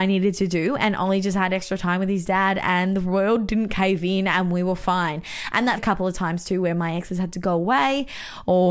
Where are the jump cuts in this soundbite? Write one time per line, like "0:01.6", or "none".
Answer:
0:05.8